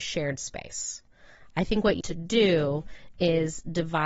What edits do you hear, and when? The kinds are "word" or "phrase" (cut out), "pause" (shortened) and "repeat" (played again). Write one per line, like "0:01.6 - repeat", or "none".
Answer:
0:02.0 - word